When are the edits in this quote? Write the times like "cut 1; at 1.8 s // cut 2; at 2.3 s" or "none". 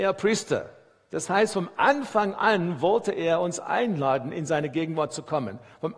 none

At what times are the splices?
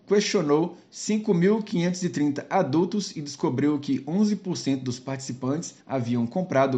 cut 1; at 5.8 s

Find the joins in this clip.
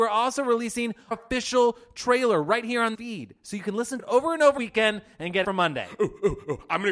cut 1; at 1.1 s // cut 2; at 2.9 s // cut 3; at 4.0 s // cut 4; at 4.6 s // cut 5; at 5.4 s

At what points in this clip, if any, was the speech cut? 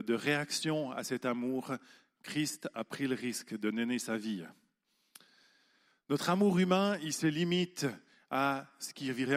none

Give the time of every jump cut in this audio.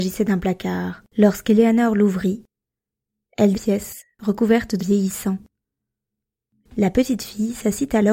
cut 1; at 1.1 s // cut 2; at 3.5 s // cut 3; at 4.8 s

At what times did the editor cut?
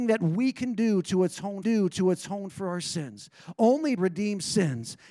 cut 1; at 1.6 s // cut 2; at 4.0 s

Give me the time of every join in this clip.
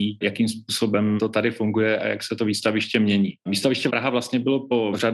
none

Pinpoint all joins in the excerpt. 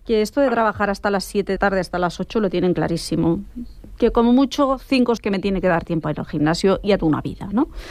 cut 1; at 1.6 s // cut 2; at 5.2 s // cut 3; at 7.0 s

